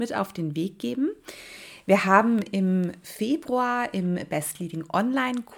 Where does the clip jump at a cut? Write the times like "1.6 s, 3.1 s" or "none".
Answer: none